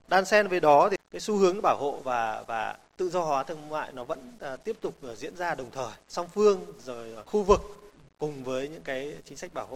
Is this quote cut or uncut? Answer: uncut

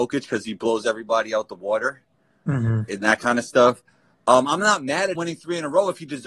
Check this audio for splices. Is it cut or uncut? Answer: cut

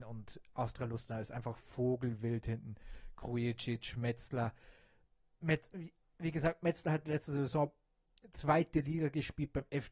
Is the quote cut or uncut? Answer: uncut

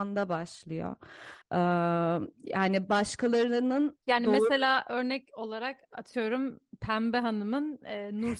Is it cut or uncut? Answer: cut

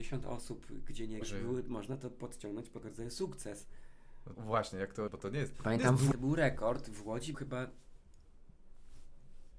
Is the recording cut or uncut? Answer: cut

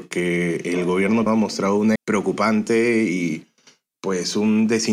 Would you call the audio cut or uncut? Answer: cut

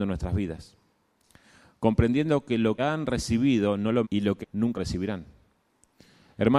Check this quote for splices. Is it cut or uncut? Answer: cut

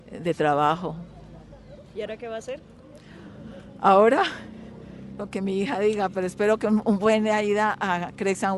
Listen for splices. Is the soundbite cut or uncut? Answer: cut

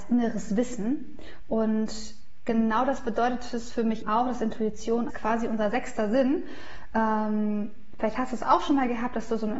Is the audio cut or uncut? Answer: cut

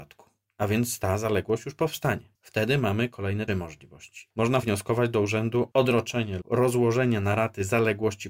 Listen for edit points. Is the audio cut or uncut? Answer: cut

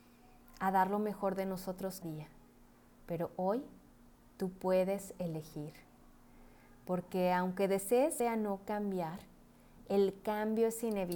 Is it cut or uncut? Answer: cut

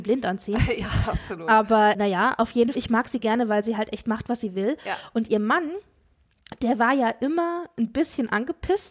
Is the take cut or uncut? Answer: cut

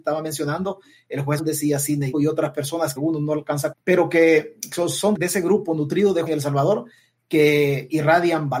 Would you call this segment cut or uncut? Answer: cut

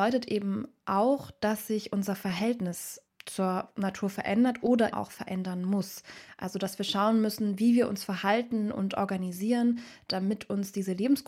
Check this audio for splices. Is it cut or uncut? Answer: cut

